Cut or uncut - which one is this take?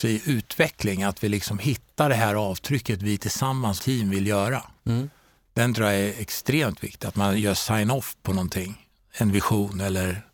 cut